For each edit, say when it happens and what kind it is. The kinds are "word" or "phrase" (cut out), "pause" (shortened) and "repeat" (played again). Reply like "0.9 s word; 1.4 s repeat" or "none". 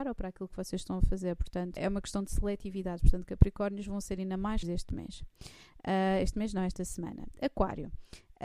1.8 s word; 4.6 s word